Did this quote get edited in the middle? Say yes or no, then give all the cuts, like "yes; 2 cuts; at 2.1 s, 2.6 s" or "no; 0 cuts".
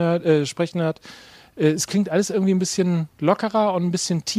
no; 0 cuts